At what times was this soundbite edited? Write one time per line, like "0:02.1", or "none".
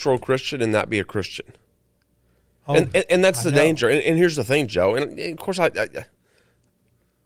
none

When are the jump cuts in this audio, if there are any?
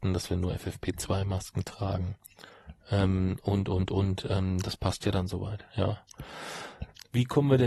none

